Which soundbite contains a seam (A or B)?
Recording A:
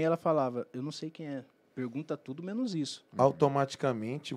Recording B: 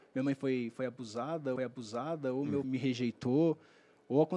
B